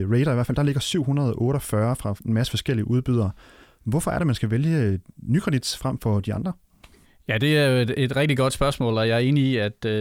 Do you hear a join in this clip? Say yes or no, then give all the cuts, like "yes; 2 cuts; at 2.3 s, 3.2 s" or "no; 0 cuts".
yes; 1 cut; at 7.0 s